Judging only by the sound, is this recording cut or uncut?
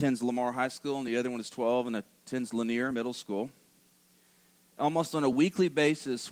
uncut